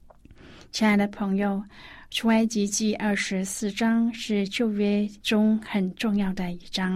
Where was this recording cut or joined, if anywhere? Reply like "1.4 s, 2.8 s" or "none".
5.2 s